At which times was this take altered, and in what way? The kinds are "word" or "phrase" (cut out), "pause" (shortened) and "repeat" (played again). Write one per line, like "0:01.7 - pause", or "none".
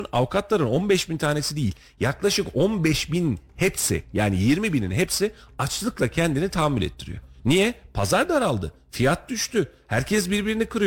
none